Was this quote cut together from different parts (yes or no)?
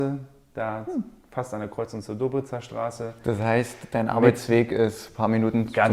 no